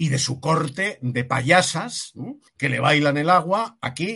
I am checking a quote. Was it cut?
yes; 1 cut; at 2.5 s

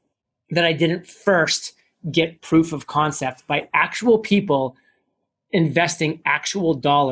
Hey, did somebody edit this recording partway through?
no; 0 cuts

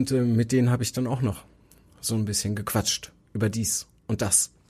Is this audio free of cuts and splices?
yes; 0 cuts

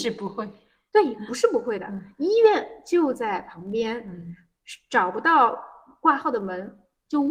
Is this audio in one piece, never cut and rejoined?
yes; 0 cuts

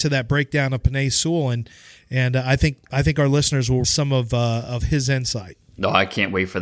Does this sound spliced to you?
yes; 1 cut; at 3.8 s

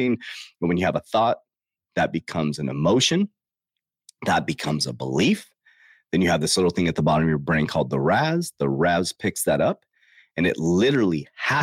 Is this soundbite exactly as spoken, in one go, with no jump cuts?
yes; 0 cuts

